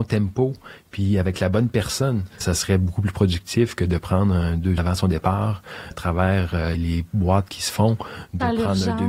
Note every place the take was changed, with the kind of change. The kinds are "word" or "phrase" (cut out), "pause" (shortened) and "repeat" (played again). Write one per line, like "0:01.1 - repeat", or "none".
0:02.4 - word
0:04.8 - word
0:05.9 - word
0:06.7 - word